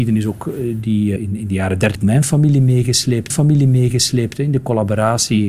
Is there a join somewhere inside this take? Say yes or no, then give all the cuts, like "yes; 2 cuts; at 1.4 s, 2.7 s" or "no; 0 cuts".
yes; 3 cuts; at 1.2 s, 2.0 s, 3.3 s